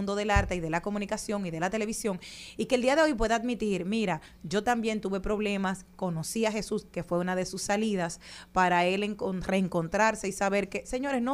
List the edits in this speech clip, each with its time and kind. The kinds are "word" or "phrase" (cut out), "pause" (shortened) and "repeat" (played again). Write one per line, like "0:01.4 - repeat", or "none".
none